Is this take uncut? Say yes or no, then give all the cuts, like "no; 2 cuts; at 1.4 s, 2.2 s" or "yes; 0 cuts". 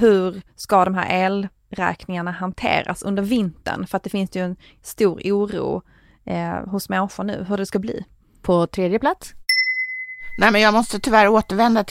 yes; 0 cuts